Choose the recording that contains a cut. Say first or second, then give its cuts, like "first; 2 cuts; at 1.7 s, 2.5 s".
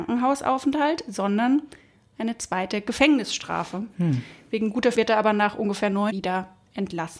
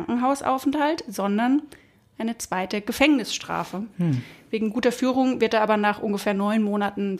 first; 2 cuts; at 4.9 s, 6.1 s